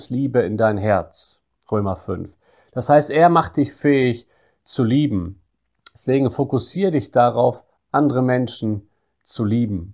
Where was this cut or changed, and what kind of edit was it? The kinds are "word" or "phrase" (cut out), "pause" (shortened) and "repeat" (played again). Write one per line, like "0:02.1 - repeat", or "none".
none